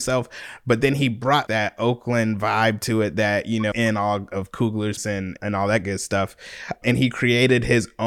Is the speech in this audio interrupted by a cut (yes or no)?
yes